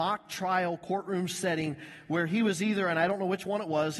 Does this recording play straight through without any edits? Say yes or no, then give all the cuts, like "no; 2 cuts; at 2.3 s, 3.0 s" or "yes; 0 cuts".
yes; 0 cuts